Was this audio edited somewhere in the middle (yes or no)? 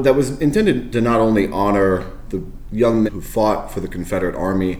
yes